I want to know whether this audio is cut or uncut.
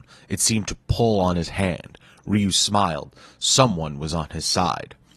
uncut